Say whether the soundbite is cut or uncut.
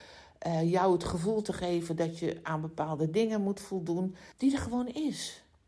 cut